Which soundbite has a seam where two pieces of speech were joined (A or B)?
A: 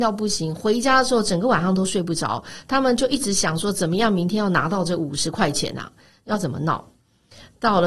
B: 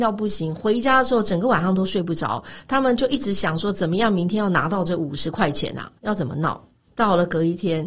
B